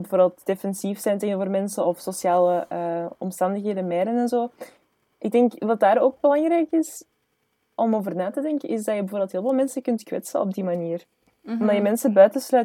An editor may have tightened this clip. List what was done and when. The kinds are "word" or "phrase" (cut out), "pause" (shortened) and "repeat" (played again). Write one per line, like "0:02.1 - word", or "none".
none